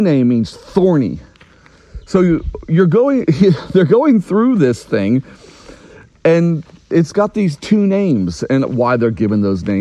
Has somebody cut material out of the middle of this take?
no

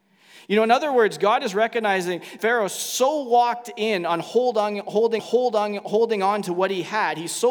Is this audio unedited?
no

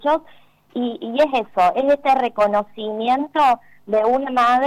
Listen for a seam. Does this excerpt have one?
no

